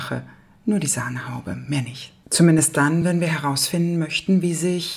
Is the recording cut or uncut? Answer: uncut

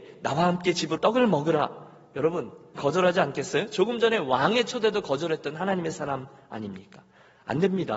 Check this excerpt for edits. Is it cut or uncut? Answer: cut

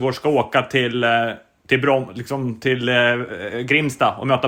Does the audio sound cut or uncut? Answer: uncut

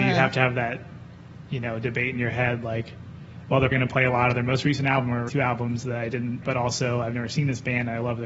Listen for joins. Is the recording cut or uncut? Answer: cut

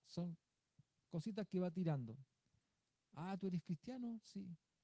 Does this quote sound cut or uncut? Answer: uncut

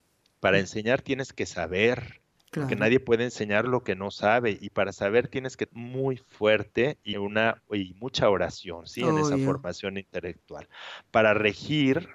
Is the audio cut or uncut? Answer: cut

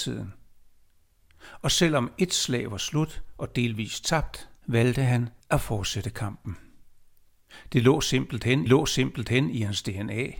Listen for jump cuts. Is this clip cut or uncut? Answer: cut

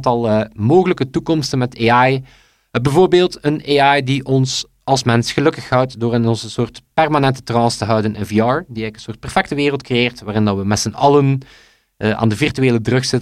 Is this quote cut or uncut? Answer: uncut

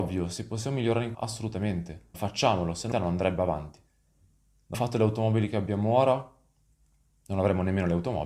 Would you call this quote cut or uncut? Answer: cut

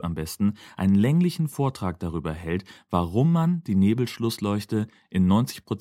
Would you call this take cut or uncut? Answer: uncut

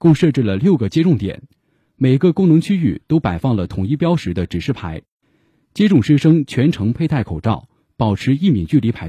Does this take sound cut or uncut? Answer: uncut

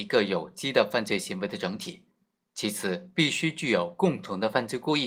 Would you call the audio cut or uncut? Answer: cut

